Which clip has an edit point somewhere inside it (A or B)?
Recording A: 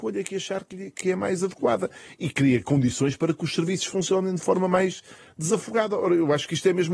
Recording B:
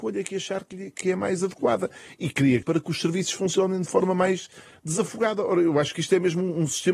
B